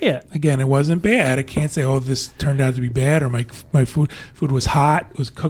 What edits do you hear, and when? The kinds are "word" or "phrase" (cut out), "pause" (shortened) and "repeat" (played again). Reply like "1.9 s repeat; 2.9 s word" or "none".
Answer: none